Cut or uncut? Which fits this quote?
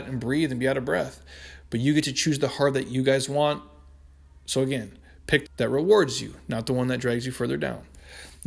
cut